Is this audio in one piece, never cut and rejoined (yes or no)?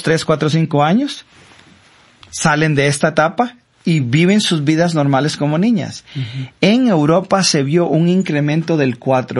yes